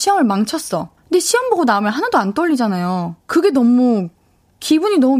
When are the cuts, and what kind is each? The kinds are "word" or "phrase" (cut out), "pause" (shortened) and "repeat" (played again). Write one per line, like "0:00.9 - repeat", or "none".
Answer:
0:01.0 - pause
0:03.2 - pause